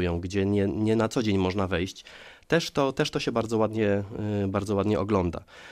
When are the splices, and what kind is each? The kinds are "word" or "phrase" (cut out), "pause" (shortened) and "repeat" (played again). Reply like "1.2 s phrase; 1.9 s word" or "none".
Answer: 3.3 s word